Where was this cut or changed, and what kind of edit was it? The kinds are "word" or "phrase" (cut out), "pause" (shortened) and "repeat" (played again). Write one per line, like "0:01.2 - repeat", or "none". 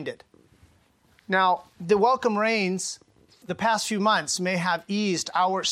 0:03.4 - word

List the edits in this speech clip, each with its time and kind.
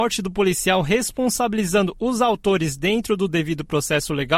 none

